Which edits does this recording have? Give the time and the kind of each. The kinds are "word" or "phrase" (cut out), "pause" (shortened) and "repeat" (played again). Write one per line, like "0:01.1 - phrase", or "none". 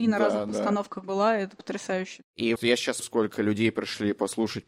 0:02.6 - word
0:03.0 - word